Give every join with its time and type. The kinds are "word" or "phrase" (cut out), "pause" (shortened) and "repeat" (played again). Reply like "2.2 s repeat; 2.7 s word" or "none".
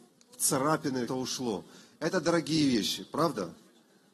1.1 s phrase